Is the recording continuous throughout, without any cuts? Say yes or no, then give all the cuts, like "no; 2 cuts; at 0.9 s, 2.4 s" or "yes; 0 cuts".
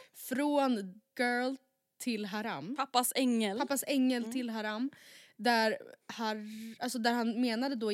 no; 2 cuts; at 1.1 s, 6.0 s